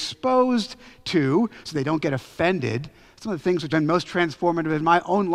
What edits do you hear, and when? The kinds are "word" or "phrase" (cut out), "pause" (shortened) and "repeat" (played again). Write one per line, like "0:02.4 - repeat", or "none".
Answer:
0:03.7 - word